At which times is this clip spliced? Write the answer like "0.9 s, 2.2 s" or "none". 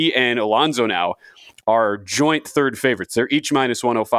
none